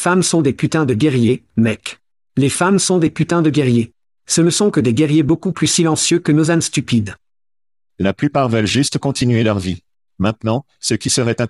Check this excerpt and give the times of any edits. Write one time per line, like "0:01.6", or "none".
none